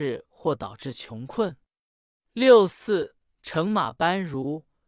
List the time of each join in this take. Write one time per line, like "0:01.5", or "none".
0:01.9
0:03.2